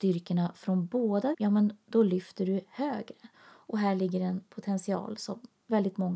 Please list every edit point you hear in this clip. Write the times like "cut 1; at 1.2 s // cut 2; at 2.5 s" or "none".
cut 1; at 1.3 s // cut 2; at 3.3 s